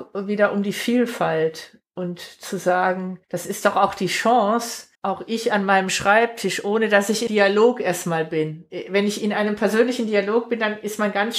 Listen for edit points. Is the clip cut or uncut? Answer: cut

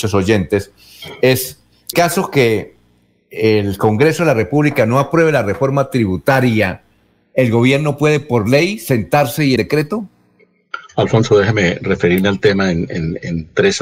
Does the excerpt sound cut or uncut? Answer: cut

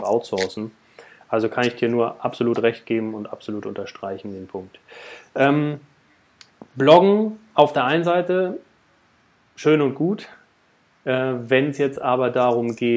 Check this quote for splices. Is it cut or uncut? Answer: uncut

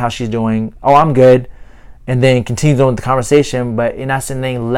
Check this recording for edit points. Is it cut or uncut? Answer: uncut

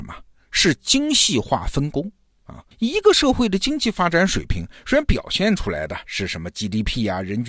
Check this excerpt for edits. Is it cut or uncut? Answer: cut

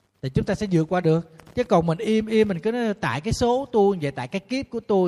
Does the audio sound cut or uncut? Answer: uncut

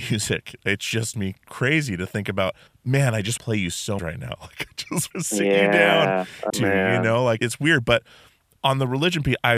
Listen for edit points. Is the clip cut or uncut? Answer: cut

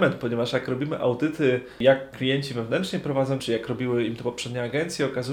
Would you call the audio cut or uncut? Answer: cut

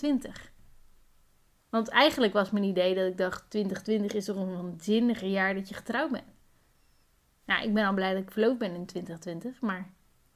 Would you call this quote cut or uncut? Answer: uncut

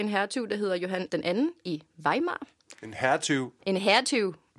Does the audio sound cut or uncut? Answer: cut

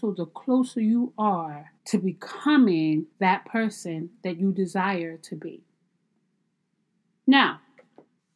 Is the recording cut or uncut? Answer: cut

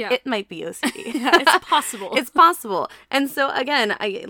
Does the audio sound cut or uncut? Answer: uncut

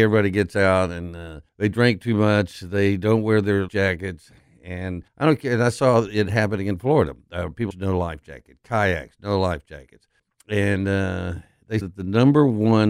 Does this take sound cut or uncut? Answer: cut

